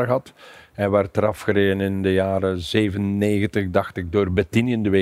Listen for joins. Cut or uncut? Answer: uncut